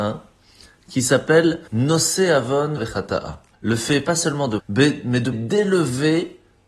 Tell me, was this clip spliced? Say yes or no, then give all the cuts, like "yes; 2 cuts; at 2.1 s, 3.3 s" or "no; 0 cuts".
yes; 5 cuts; at 1.7 s, 2.8 s, 3.5 s, 4.6 s, 5.3 s